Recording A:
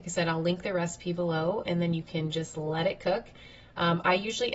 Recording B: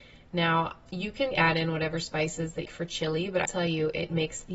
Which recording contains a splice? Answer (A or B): B